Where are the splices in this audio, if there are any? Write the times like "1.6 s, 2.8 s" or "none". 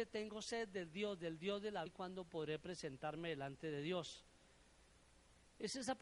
1.9 s